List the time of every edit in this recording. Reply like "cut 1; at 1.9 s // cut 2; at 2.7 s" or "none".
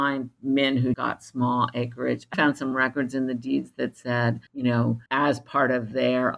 cut 1; at 0.9 s // cut 2; at 2.3 s // cut 3; at 4.5 s // cut 4; at 5.1 s